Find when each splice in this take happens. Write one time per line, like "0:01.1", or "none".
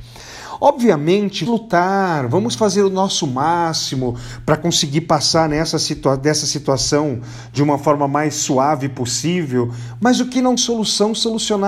0:01.5
0:10.6